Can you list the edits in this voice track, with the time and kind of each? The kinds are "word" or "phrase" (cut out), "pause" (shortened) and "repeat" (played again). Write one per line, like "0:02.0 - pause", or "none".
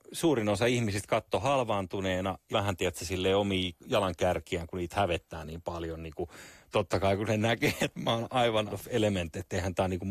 0:02.5 - word
0:08.7 - word